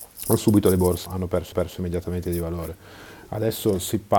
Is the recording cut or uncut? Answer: cut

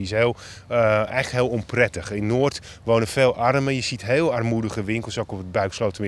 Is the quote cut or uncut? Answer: uncut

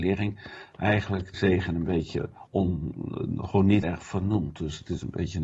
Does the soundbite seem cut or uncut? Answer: cut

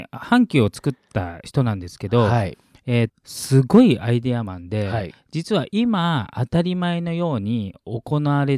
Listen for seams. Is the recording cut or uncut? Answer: cut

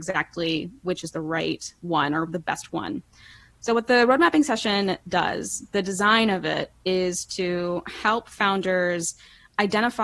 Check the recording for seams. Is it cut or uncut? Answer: uncut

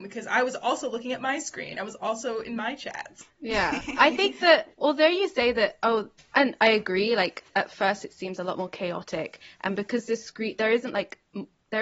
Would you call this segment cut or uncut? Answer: cut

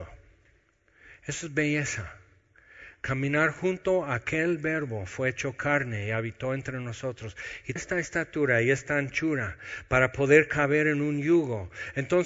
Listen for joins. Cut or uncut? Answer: cut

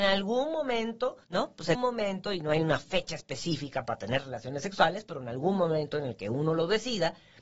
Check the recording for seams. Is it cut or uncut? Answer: cut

